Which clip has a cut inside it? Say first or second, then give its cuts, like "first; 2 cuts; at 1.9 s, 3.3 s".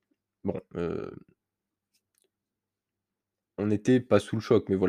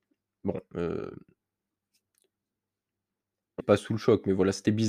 second; 1 cut; at 3.6 s